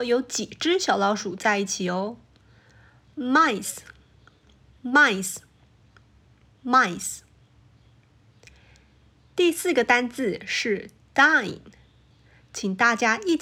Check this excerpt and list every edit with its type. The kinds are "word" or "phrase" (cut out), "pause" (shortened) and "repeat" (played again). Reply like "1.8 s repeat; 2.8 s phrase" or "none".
none